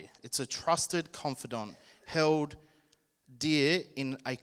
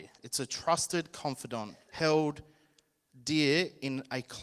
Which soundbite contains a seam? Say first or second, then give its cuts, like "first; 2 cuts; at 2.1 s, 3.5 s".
second; 1 cut; at 1.8 s